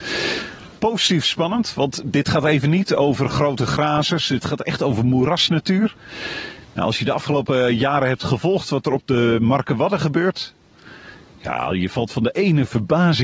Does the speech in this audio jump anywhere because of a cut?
no; 0 cuts

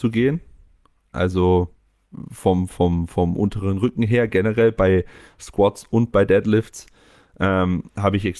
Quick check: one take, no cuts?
yes; 0 cuts

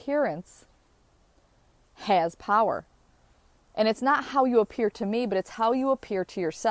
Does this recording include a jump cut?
no; 0 cuts

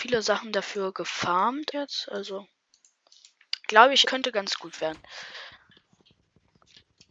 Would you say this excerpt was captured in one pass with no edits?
no; 2 cuts; at 1.7 s, 4.0 s

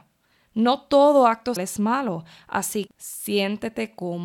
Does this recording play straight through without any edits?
no; 2 cuts; at 1.6 s, 2.9 s

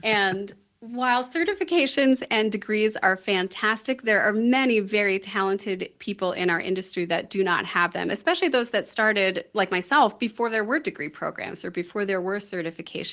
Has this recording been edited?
no; 0 cuts

